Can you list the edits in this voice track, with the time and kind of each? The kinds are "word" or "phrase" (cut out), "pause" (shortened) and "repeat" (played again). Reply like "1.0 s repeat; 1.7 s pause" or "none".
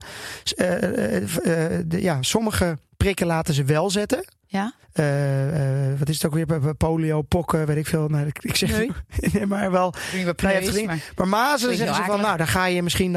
4.8 s pause